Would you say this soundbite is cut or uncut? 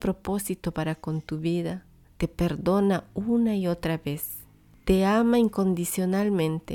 cut